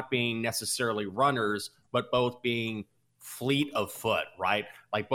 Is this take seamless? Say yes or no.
yes